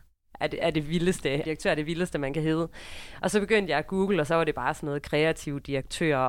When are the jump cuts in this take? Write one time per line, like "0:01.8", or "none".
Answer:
0:01.4